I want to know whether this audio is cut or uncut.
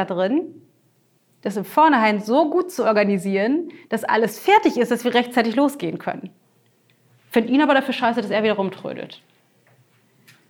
uncut